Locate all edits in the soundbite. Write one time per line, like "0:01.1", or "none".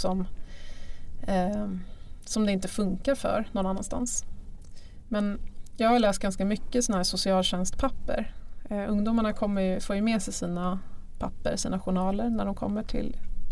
none